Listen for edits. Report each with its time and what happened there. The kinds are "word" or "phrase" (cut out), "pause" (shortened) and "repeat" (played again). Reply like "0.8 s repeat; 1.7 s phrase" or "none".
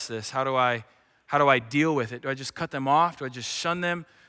none